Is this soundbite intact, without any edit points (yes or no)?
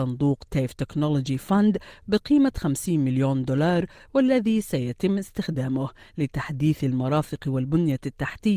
yes